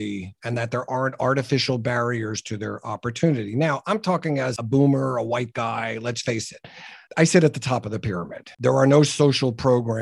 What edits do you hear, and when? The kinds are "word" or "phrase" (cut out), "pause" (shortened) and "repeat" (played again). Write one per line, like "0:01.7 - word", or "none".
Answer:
0:08.5 - pause